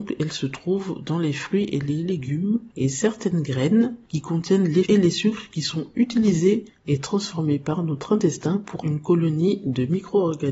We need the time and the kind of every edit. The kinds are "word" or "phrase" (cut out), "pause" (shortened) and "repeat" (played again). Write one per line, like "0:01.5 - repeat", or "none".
0:04.8 - word
0:08.8 - word